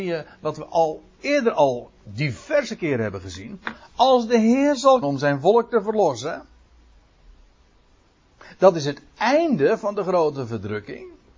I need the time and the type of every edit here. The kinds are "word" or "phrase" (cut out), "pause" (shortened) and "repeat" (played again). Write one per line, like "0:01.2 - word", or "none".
0:01.2 - word
0:05.0 - word